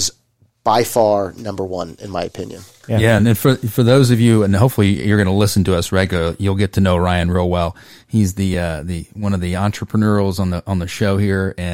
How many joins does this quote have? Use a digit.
0